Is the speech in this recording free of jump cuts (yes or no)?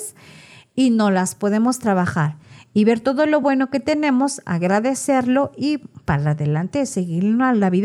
yes